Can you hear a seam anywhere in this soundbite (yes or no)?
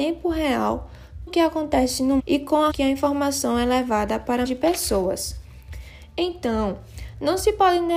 yes